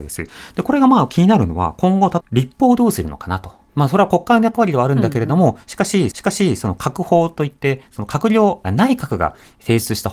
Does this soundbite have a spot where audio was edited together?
yes; 4 cuts; at 2.2 s, 3.7 s, 6.1 s, 8.6 s

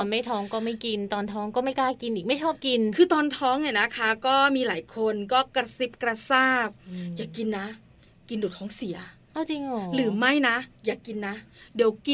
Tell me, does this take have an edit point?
no; 0 cuts

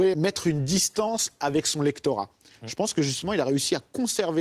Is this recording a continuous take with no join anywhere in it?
yes; 0 cuts

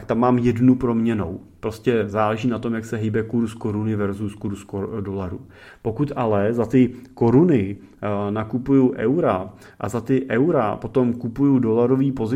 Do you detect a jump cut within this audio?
no; 0 cuts

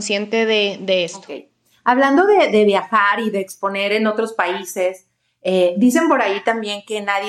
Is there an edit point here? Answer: no; 0 cuts

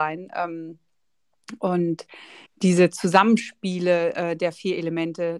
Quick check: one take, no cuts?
no; 1 cut; at 2.5 s

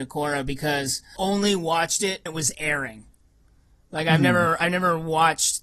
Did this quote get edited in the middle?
yes; 2 cuts; at 1.2 s, 2.3 s

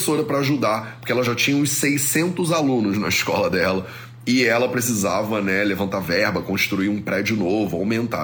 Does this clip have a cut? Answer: no; 0 cuts

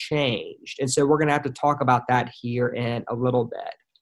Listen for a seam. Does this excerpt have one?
no; 0 cuts

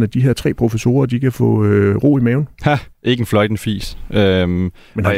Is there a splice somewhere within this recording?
yes; 1 cut; at 2.9 s

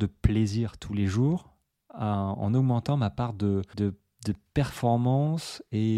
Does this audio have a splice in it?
yes; 1 cut; at 3.7 s

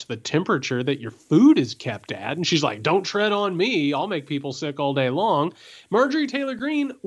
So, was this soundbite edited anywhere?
no; 0 cuts

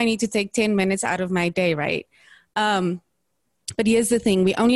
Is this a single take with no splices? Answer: yes; 0 cuts

